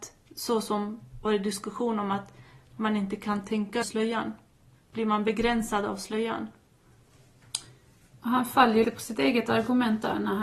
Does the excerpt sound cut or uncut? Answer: cut